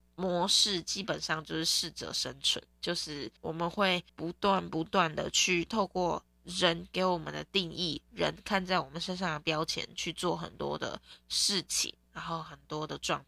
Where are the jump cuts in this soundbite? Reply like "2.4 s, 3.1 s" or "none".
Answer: 3.4 s, 4.1 s